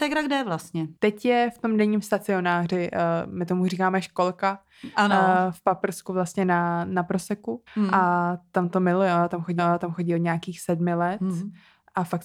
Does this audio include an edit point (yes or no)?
yes